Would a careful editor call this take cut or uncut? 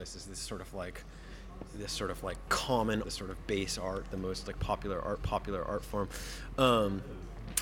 cut